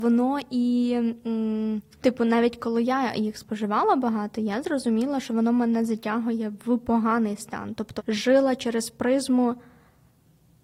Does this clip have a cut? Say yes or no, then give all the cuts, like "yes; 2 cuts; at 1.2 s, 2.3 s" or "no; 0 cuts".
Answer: yes; 2 cuts; at 2.0 s, 8.0 s